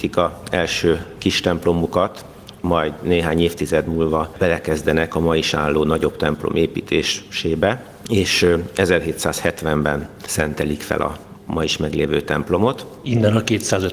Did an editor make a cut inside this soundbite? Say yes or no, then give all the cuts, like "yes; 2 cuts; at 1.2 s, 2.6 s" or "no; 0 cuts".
no; 0 cuts